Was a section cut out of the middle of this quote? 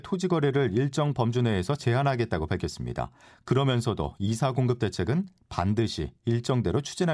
no; 0 cuts

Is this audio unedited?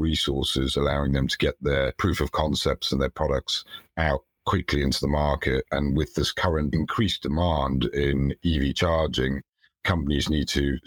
yes; 0 cuts

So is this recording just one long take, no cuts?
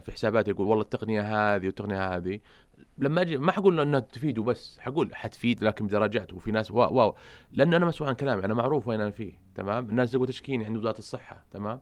yes; 0 cuts

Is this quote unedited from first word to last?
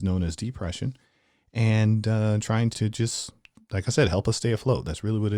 no; 1 cut; at 2.7 s

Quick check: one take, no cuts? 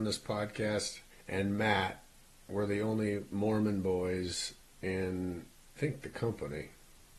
no; 1 cut; at 5.8 s

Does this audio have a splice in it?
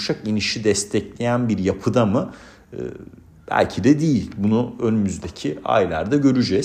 no; 0 cuts

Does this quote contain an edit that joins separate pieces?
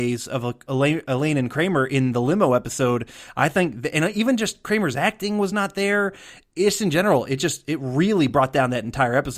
no; 0 cuts

